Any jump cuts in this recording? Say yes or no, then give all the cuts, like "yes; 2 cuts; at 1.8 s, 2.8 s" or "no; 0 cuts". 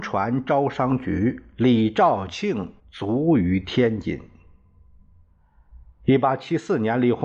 yes; 1 cut; at 2.8 s